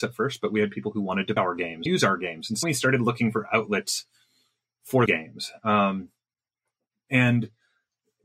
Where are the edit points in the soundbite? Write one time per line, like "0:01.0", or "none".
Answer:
0:01.4
0:01.9
0:02.6
0:05.1

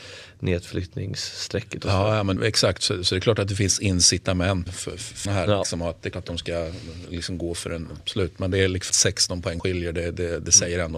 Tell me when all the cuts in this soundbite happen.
0:02.4
0:04.7
0:05.3
0:06.1
0:08.0
0:08.9
0:09.6

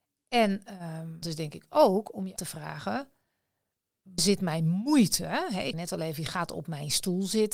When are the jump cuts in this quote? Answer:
0:01.2
0:02.4
0:04.2
0:05.7

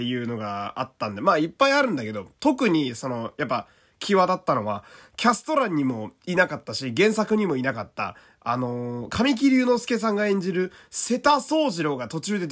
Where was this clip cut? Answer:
none

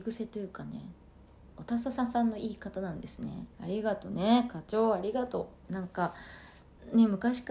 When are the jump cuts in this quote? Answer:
0:03.5

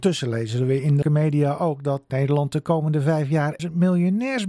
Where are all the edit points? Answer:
0:01.0
0:02.1
0:03.6

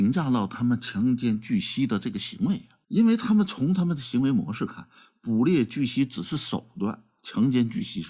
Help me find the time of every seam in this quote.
0:02.8

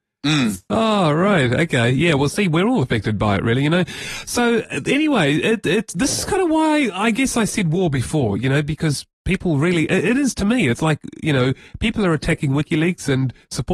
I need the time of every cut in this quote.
0:09.1

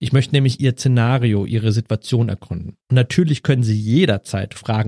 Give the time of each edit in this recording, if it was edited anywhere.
0:02.8

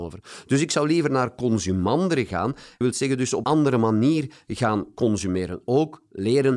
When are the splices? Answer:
0:02.8
0:03.4

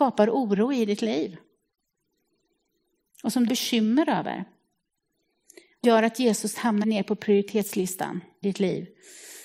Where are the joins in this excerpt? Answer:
0:03.5
0:05.8
0:06.8
0:08.4

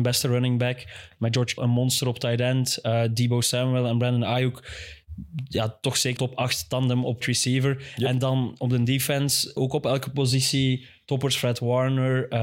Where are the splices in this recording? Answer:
0:01.6
0:06.2
0:07.2
0:09.6

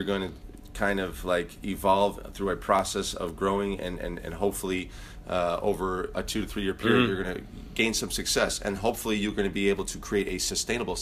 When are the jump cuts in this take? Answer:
none

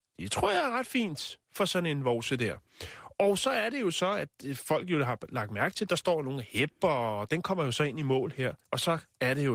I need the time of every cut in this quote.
0:01.4
0:08.6

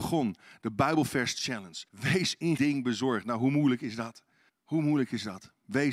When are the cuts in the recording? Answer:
0:01.9
0:02.6
0:04.5

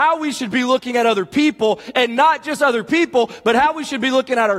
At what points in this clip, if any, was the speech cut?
none

